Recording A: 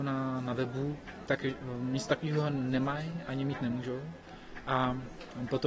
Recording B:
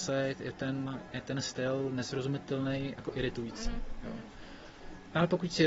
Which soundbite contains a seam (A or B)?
B